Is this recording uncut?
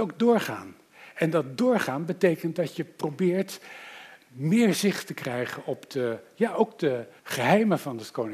no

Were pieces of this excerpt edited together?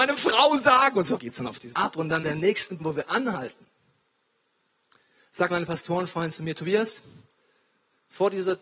yes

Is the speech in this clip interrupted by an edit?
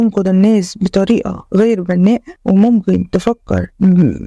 no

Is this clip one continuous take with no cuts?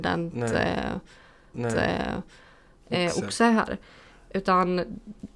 no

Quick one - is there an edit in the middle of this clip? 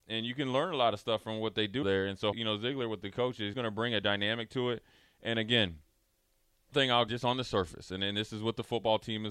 yes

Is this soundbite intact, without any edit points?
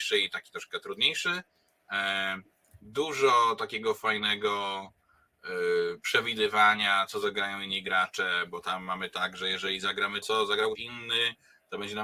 no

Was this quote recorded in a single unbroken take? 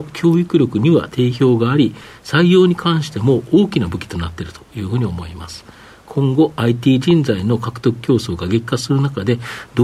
yes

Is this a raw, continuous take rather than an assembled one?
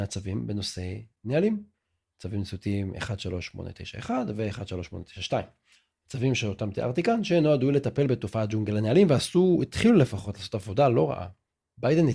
yes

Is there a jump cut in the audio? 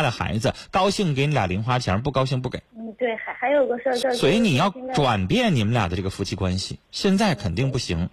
yes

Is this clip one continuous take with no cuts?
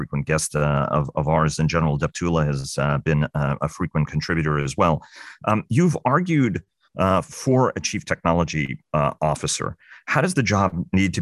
yes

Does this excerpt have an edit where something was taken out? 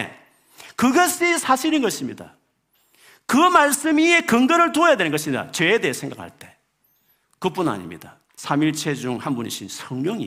yes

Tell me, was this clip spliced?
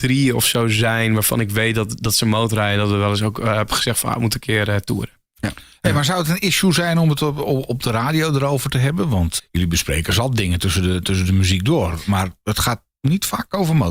yes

